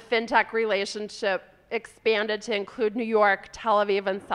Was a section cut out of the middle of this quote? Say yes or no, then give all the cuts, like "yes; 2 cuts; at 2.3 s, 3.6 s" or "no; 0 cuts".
no; 0 cuts